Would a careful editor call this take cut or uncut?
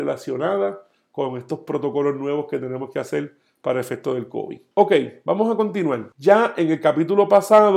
uncut